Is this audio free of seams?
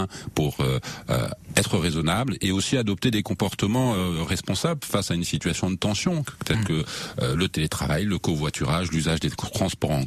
yes; 0 cuts

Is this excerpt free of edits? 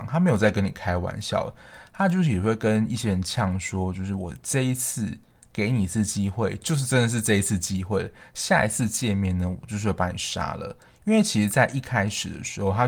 yes; 0 cuts

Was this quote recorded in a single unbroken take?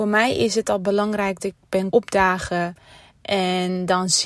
no; 2 cuts; at 1.4 s, 1.9 s

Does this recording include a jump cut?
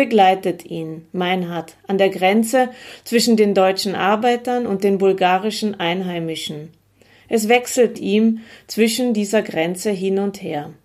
yes; 1 cut; at 7.9 s

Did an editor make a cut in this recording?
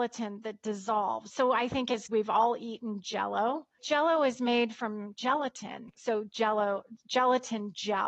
yes; 1 cut; at 2.1 s

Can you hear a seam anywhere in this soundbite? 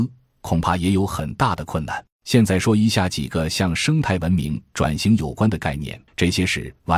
yes; 2 cuts; at 2.1 s, 6.1 s

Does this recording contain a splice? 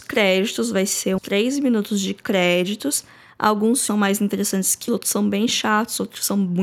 yes; 3 cuts; at 1.2 s, 3.9 s, 4.9 s

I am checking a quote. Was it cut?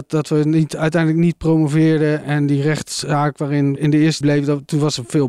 yes; 3 cuts; at 2.2 s, 3.8 s, 4.2 s

